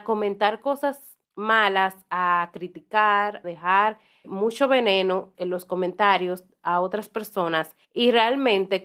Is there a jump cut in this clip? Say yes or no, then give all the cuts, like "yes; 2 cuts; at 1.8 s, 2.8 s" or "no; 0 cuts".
yes; 5 cuts; at 1.2 s, 3.4 s, 4.2 s, 5.3 s, 7.8 s